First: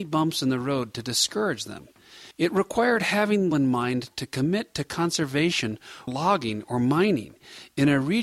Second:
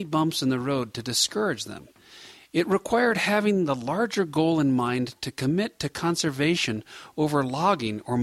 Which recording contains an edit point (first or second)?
first